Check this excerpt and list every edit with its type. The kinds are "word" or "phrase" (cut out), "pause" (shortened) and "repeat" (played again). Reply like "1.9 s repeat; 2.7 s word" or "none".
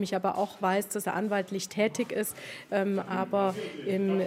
none